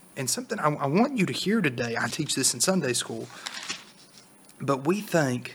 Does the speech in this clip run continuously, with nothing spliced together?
no; 1 cut; at 2.1 s

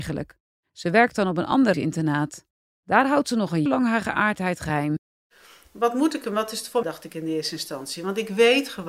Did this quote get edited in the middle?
yes; 3 cuts; at 1.7 s, 3.7 s, 6.8 s

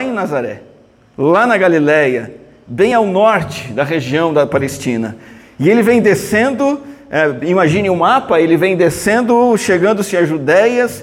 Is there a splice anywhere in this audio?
no; 0 cuts

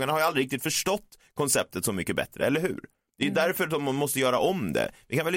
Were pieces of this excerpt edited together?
no; 0 cuts

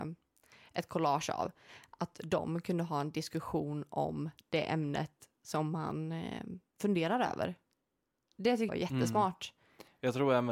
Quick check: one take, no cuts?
no; 1 cut; at 8.7 s

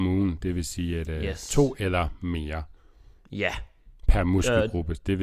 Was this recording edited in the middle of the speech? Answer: no; 0 cuts

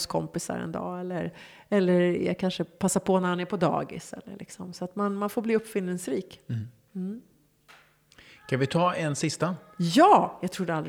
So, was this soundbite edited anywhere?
no; 0 cuts

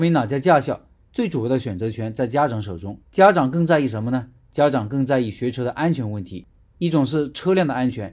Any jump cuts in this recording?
yes; 1 cut; at 3.0 s

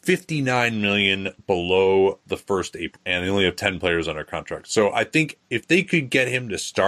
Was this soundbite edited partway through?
no; 0 cuts

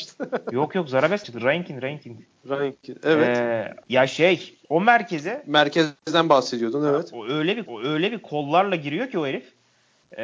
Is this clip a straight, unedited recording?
no; 4 cuts; at 1.2 s, 3.8 s, 4.6 s, 7.7 s

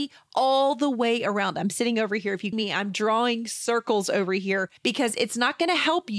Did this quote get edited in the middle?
yes; 2 cuts; at 2.5 s, 4.8 s

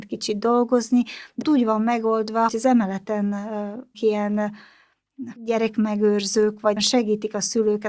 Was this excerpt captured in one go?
no; 5 cuts; at 1.4 s, 2.5 s, 3.9 s, 5.4 s, 6.8 s

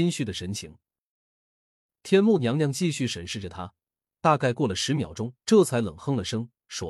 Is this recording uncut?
no; 1 cut; at 5.4 s

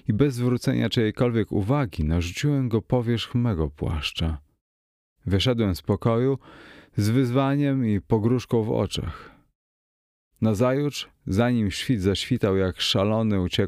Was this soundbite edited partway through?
no; 0 cuts

